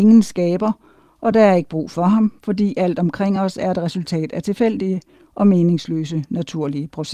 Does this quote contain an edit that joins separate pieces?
no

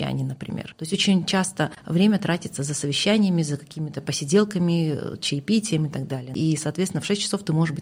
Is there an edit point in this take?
no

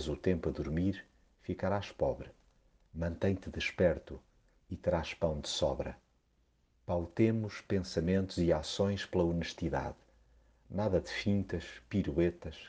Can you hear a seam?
no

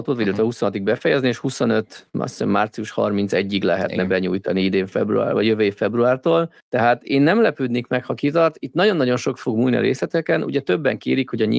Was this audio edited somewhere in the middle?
yes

